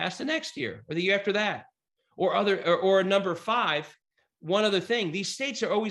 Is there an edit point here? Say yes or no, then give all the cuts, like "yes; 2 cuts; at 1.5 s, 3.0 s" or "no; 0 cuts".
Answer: yes; 1 cut; at 4.0 s